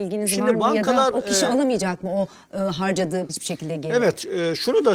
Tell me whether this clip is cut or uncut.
cut